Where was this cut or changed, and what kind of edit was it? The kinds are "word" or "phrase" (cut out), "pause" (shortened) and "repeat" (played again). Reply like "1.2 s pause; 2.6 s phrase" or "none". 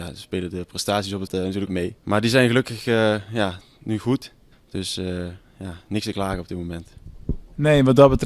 1.3 s word; 1.7 s phrase; 2.0 s pause; 4.5 s pause